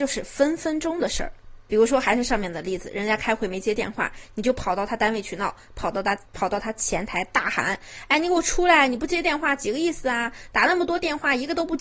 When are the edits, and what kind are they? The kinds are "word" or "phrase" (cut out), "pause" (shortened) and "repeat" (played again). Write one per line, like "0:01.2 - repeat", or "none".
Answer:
0:06.3 - pause